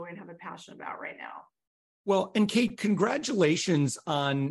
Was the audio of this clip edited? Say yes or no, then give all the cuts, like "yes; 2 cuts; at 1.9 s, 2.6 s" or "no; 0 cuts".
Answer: no; 0 cuts